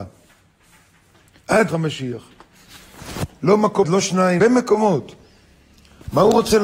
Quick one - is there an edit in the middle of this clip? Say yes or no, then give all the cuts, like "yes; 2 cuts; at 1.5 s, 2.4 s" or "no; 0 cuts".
yes; 3 cuts; at 1.7 s, 3.8 s, 4.4 s